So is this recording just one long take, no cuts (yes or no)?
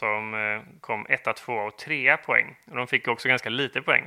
yes